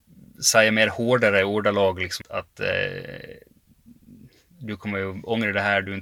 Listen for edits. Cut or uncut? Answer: cut